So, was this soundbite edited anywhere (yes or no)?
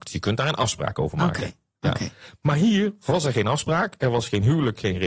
no